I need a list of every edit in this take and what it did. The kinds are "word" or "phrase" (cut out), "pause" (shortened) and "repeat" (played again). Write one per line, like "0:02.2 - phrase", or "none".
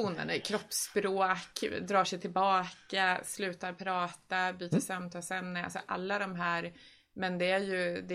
none